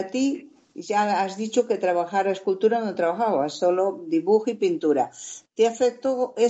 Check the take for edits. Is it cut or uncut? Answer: uncut